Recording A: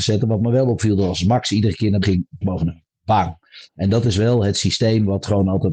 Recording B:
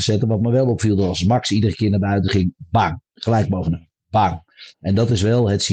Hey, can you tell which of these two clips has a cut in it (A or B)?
A